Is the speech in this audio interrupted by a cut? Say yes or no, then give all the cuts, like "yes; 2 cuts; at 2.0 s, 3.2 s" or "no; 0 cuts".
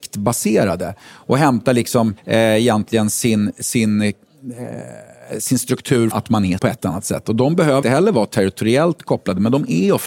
yes; 4 cuts; at 2.2 s, 6.1 s, 6.6 s, 7.8 s